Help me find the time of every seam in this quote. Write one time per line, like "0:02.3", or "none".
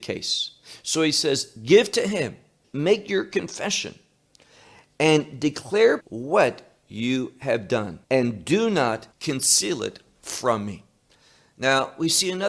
0:02.6
0:06.0
0:08.0
0:09.1

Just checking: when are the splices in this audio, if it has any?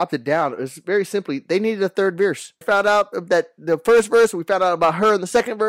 0:02.6

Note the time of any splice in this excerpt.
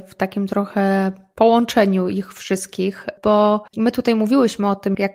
0:03.7

